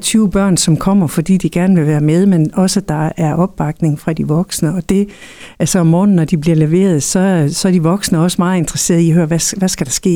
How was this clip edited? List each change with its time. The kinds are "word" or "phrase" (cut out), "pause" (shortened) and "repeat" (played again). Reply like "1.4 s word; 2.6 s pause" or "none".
none